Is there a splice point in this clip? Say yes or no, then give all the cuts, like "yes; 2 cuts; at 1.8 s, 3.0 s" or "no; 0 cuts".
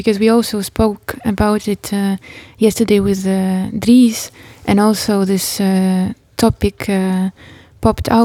no; 0 cuts